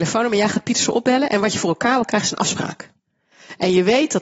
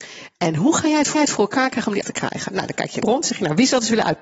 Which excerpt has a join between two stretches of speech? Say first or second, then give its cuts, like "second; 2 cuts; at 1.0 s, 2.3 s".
second; 3 cuts; at 1.1 s, 2.0 s, 3.0 s